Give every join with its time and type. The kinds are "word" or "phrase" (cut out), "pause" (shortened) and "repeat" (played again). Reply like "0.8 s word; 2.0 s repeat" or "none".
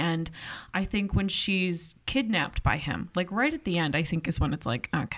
none